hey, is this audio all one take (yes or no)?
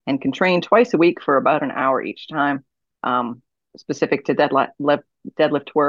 yes